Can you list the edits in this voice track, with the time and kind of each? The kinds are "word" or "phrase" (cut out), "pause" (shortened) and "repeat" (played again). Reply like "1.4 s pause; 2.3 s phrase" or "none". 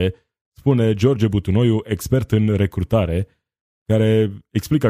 none